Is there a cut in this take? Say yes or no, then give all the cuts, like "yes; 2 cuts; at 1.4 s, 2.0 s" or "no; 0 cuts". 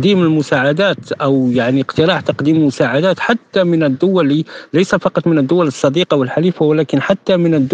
no; 0 cuts